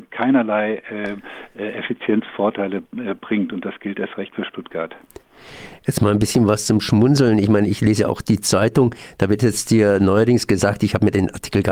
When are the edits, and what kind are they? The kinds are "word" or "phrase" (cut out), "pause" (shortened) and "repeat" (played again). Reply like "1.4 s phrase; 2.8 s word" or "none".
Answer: none